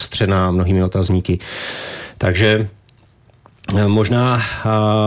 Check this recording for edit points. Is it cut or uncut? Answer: uncut